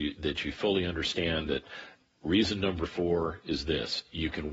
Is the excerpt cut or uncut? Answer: uncut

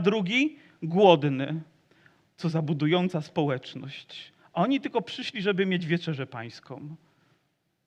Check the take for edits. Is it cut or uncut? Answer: uncut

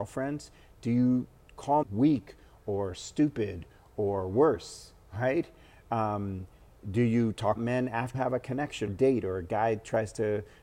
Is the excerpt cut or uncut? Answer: cut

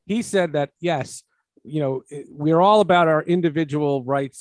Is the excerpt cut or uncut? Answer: uncut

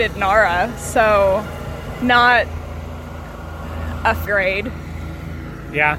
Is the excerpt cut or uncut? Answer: cut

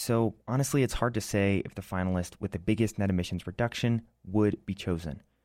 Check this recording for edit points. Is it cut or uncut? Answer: uncut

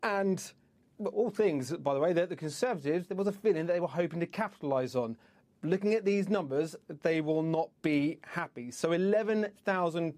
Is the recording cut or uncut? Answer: uncut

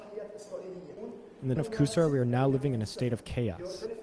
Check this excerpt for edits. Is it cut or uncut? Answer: cut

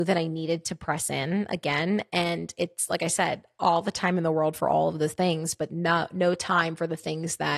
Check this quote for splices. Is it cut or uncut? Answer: uncut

